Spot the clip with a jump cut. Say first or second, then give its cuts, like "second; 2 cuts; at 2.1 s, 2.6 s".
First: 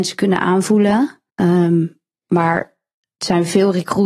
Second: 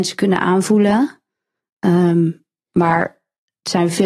first; 1 cut; at 1.3 s